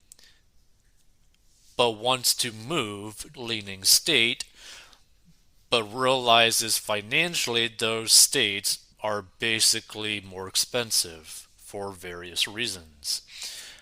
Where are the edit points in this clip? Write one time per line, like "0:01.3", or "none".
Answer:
0:03.3
0:08.9